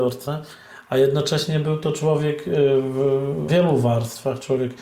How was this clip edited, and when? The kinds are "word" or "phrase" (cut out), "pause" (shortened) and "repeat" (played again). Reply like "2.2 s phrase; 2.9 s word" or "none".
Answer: 3.5 s word